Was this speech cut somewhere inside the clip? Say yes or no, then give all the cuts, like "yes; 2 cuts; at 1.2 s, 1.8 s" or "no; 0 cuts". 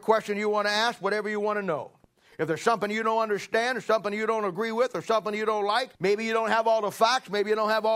yes; 1 cut; at 5.9 s